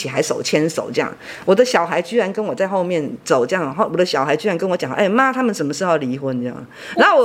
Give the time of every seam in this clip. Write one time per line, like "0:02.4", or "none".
none